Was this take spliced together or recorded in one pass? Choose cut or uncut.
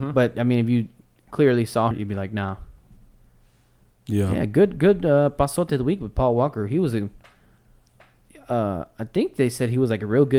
cut